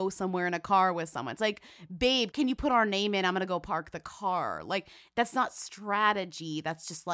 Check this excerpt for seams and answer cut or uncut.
uncut